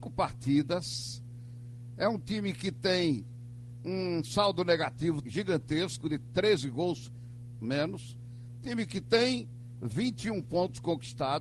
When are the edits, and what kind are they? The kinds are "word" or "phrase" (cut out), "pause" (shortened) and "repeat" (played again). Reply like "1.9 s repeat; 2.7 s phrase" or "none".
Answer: 5.2 s word; 7.6 s word